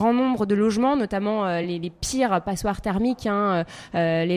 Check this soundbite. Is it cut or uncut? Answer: uncut